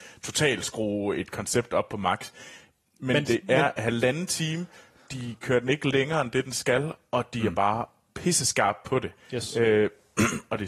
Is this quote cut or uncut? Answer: uncut